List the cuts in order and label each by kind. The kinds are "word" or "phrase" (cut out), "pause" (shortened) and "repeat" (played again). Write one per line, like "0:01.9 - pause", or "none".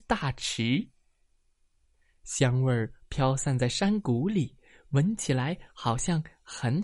none